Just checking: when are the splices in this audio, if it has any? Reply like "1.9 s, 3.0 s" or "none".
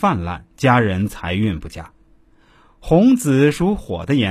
none